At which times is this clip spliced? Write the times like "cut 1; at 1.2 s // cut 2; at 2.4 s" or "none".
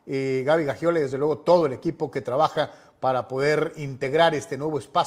none

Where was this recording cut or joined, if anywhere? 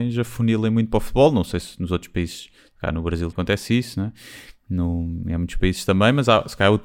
cut 1; at 3.3 s

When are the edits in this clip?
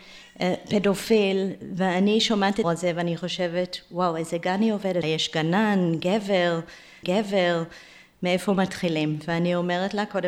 cut 1; at 2.6 s // cut 2; at 5.0 s // cut 3; at 7.0 s

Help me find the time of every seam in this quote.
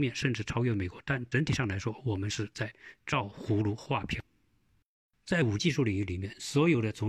cut 1; at 5.6 s

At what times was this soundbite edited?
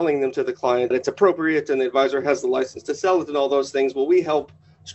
cut 1; at 0.9 s

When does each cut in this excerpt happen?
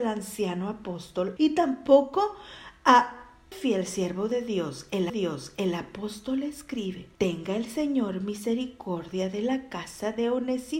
cut 1; at 1.4 s // cut 2; at 3.5 s // cut 3; at 5.1 s // cut 4; at 7.2 s

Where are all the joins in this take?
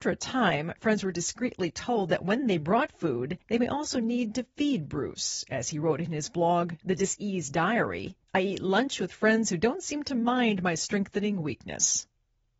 cut 1; at 3.4 s // cut 2; at 8.2 s

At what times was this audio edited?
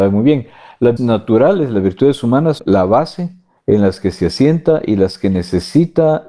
cut 1; at 1.0 s // cut 2; at 2.6 s // cut 3; at 3.6 s

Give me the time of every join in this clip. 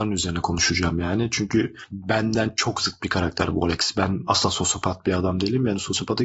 none

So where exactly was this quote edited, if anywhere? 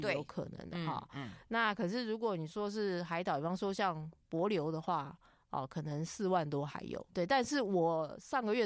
cut 1; at 7.1 s

